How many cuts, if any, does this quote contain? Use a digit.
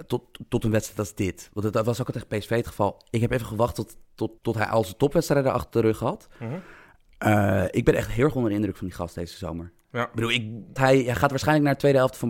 2